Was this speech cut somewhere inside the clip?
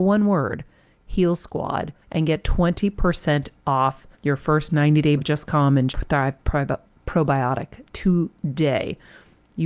yes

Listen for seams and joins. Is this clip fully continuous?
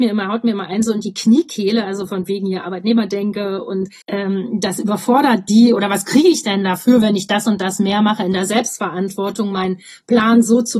no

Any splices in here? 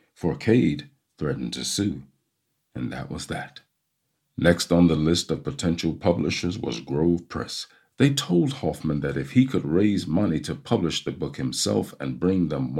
no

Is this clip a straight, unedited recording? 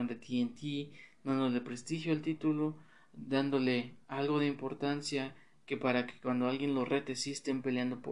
yes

